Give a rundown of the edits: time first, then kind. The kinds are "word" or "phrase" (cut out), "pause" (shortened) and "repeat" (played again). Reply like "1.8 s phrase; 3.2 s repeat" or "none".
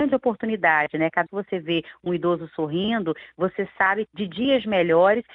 1.3 s word; 4.1 s phrase